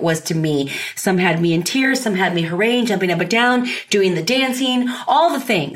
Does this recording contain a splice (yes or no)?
no